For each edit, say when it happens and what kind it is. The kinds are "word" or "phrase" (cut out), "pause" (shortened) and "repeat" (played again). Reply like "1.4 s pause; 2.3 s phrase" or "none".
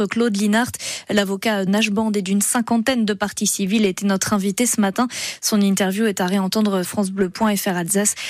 1.7 s phrase; 6.8 s word